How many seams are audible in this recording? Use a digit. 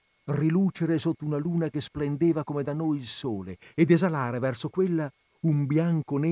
0